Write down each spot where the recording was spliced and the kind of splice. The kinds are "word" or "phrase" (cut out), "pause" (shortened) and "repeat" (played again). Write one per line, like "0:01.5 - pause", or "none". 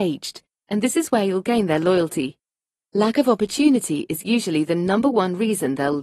none